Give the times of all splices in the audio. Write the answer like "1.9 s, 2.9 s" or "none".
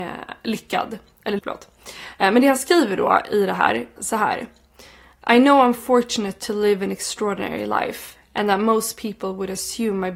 1.4 s, 4.0 s